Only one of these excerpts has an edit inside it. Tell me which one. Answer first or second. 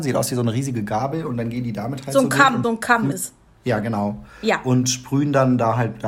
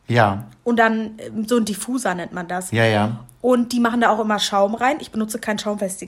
first